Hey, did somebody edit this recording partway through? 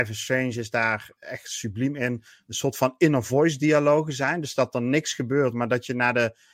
no; 0 cuts

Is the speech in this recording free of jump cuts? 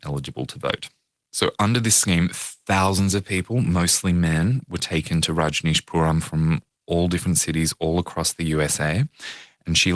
yes; 0 cuts

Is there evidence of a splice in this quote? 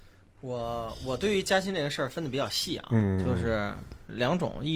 no; 0 cuts

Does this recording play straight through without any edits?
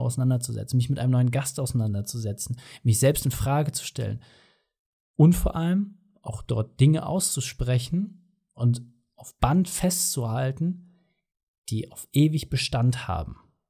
yes; 0 cuts

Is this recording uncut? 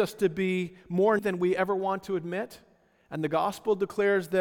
no; 1 cut; at 1.2 s

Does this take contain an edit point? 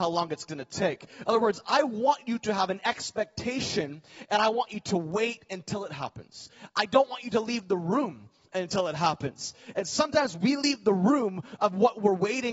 no; 0 cuts

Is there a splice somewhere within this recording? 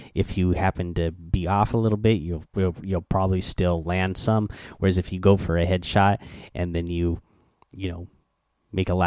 no; 0 cuts

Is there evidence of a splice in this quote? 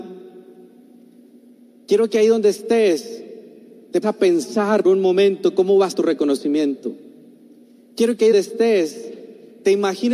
yes; 4 cuts; at 4.0 s, 4.8 s, 5.9 s, 8.3 s

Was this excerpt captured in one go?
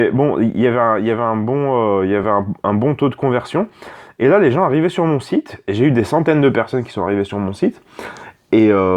yes; 0 cuts

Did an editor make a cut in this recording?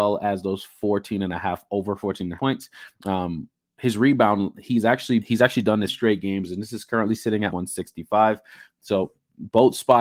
yes; 4 cuts; at 2.4 s, 5.2 s, 5.9 s, 7.5 s

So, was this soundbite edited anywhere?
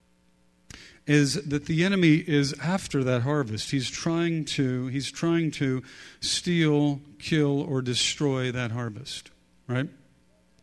no; 0 cuts

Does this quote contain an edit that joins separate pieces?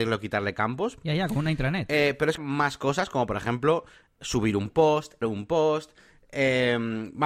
yes; 2 cuts; at 2.4 s, 5.2 s

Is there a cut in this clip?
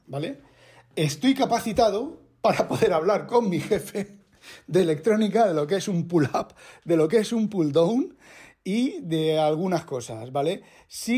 no; 0 cuts

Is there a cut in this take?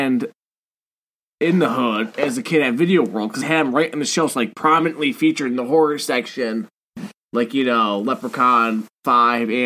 yes; 1 cut; at 3.4 s

